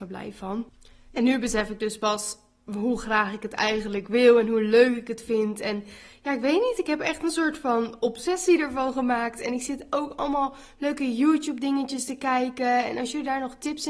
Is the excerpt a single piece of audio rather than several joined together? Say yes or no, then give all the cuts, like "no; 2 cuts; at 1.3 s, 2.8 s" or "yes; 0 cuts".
yes; 0 cuts